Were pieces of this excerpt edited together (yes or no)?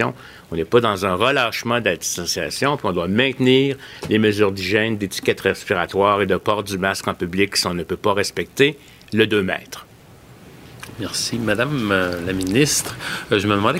no